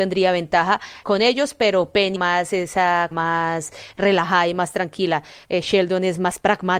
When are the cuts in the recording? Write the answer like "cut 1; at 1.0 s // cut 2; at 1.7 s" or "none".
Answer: cut 1; at 1.0 s // cut 2; at 2.2 s // cut 3; at 3.1 s